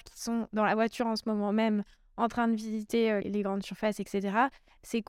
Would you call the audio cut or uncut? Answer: cut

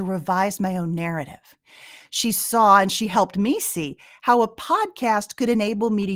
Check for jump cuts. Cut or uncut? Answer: uncut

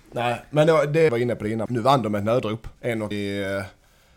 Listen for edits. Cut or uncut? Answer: cut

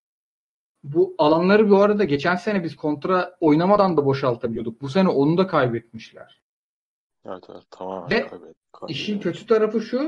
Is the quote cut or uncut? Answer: uncut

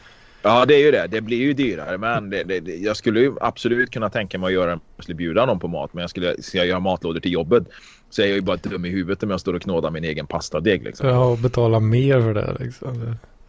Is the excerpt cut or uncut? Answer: uncut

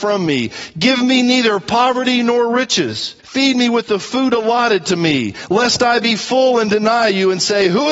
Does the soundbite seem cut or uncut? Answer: cut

